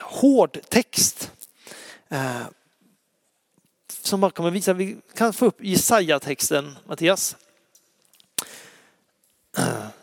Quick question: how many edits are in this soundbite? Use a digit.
0